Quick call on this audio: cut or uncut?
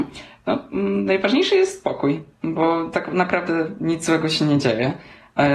uncut